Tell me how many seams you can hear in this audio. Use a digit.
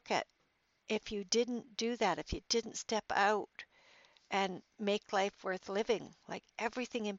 0